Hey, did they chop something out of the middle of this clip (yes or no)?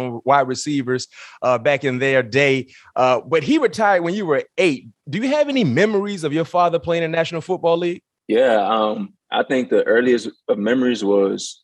yes